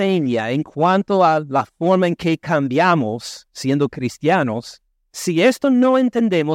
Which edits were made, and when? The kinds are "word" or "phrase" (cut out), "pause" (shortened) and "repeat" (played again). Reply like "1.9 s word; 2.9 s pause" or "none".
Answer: none